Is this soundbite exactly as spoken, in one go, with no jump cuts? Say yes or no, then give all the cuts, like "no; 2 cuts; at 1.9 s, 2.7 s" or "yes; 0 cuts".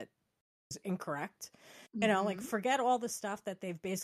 no; 1 cut; at 1.9 s